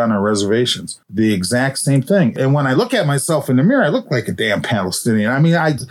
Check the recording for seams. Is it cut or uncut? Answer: cut